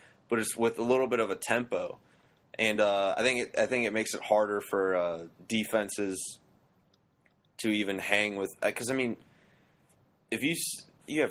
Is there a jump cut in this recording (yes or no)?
no